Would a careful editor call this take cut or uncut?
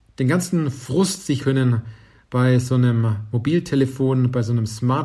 cut